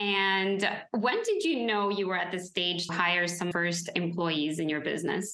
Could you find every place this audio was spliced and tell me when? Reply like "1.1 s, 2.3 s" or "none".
2.9 s, 3.5 s